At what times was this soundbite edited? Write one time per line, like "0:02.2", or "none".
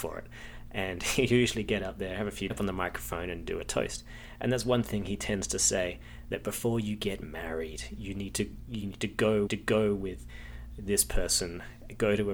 0:02.5
0:09.5